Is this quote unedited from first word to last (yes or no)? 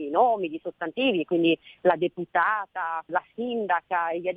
no